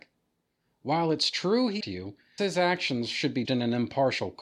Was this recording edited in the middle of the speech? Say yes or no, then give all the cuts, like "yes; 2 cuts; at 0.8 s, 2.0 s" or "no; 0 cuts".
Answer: yes; 3 cuts; at 1.8 s, 2.4 s, 3.4 s